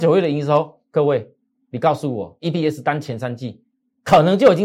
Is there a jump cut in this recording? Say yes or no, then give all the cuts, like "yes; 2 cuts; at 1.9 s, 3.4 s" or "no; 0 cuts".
no; 0 cuts